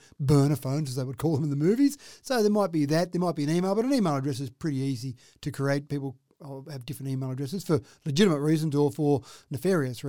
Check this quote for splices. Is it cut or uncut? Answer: uncut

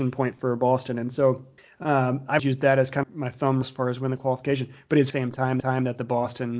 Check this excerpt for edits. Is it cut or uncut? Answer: cut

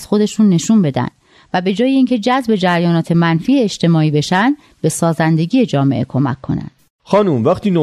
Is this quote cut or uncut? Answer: uncut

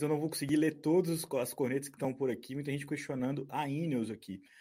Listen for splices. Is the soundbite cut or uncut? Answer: uncut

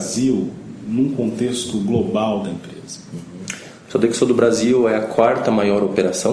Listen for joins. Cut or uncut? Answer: uncut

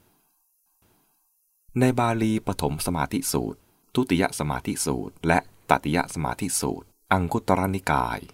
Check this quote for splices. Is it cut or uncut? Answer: cut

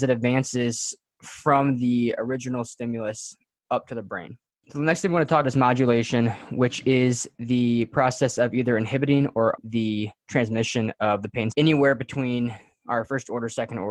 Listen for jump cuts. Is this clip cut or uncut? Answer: cut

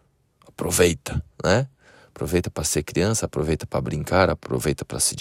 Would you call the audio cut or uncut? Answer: uncut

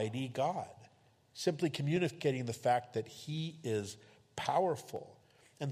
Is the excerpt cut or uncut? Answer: uncut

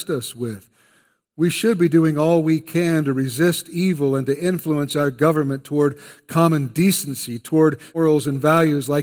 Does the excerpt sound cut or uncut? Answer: cut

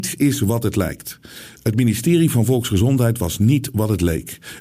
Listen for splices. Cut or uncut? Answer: uncut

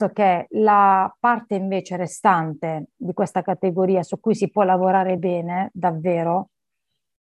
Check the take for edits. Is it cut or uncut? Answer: uncut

